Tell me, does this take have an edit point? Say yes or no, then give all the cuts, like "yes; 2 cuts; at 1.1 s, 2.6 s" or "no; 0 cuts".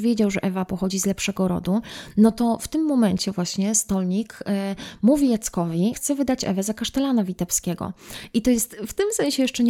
yes; 1 cut; at 5.9 s